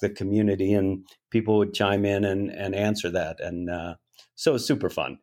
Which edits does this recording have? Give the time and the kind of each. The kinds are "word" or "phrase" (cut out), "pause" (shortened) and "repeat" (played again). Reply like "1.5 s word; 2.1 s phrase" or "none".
none